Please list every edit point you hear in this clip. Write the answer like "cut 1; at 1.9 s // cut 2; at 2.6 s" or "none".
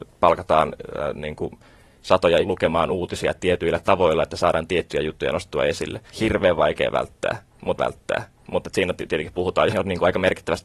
cut 1; at 2.4 s // cut 2; at 6.1 s // cut 3; at 7.8 s // cut 4; at 9.7 s